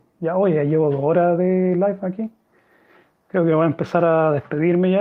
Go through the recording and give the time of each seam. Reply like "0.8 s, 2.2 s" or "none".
none